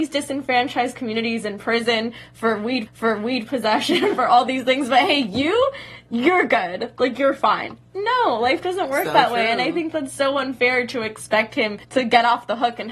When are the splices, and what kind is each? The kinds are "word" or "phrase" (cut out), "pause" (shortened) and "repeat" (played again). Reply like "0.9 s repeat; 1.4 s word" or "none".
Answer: 2.9 s repeat; 11.8 s pause